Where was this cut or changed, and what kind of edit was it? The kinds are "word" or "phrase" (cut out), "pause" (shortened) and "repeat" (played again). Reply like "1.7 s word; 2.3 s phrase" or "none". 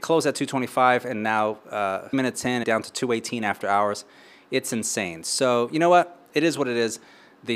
2.1 s word; 2.6 s phrase